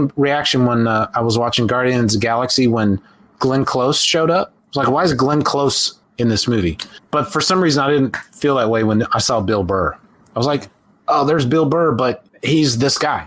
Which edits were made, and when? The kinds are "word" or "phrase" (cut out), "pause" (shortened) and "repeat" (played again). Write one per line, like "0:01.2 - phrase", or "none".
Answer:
none